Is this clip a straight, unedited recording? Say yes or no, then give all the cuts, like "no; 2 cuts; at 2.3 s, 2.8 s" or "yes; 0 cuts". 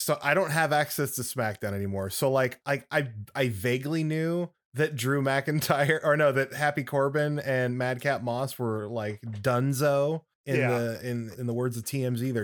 no; 4 cuts; at 2.6 s, 4.5 s, 10.3 s, 11.3 s